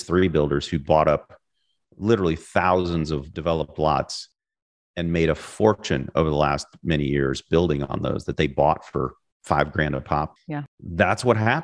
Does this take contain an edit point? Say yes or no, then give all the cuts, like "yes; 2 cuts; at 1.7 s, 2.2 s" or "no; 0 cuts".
no; 0 cuts